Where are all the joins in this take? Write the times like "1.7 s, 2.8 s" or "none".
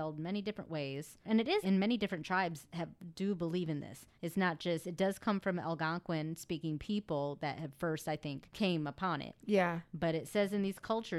1.6 s, 4.1 s

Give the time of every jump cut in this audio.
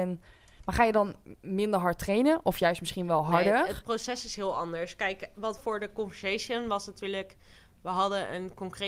5.6 s

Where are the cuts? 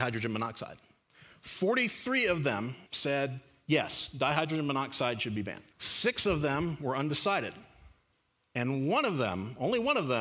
2.9 s, 5.7 s, 8.2 s

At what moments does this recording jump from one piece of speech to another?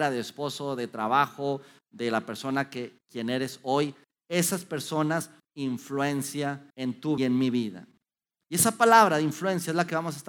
5.4 s, 6.7 s, 7.2 s

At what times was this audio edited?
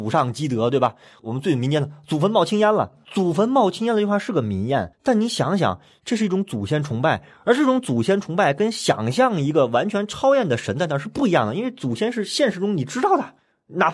4.9 s

